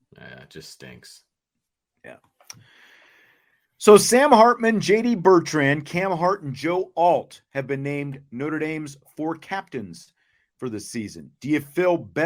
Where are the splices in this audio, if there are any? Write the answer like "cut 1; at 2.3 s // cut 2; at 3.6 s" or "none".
none